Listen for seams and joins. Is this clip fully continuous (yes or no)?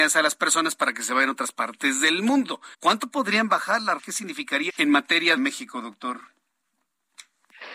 no